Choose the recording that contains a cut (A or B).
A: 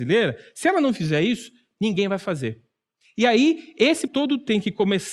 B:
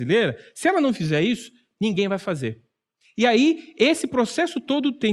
A